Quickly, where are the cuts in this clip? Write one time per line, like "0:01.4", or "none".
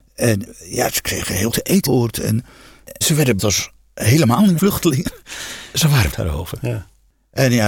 0:01.5
0:01.9
0:03.0
0:03.4
0:04.6
0:06.1